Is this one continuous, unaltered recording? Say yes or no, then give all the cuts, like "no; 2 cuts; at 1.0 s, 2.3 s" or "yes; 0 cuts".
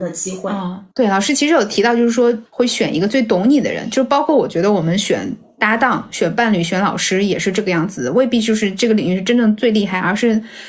no; 2 cuts; at 0.9 s, 2.5 s